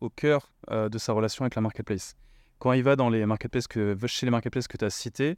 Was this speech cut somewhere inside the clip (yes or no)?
no